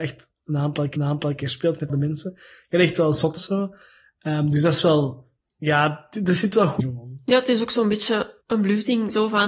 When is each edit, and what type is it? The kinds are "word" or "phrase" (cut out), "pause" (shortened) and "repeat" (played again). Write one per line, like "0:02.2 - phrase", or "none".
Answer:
0:01.0 - repeat
0:01.9 - word
0:03.4 - phrase
0:05.4 - pause
0:06.8 - word
0:08.4 - pause